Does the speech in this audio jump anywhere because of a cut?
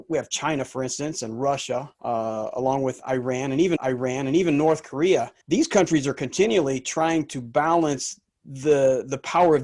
yes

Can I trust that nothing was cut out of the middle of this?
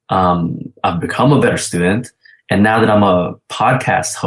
yes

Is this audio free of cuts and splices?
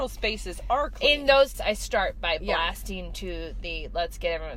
no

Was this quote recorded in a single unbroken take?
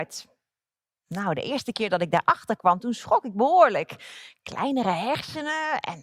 yes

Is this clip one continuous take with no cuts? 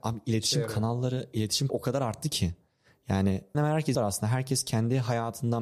no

